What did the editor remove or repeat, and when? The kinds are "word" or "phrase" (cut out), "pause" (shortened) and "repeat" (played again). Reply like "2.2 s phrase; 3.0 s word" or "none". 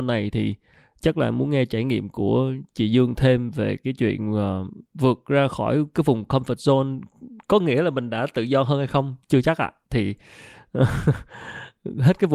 4.9 s pause; 9.2 s pause; 9.8 s pause